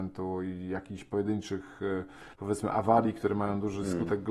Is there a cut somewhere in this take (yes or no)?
yes